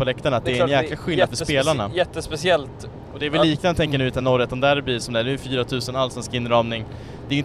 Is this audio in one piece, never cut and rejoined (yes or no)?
yes